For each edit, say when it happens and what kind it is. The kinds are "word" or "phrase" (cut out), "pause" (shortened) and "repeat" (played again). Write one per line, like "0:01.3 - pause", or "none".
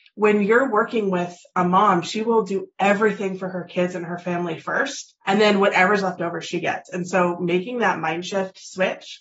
0:05.2 - pause